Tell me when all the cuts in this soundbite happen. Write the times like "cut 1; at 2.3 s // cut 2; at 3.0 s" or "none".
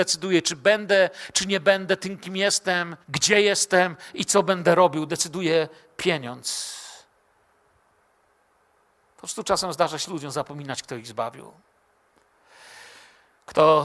cut 1; at 3.0 s